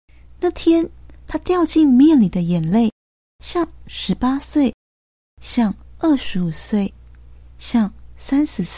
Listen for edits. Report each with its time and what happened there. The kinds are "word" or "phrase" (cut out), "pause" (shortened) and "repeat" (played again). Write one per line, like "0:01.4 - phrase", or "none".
none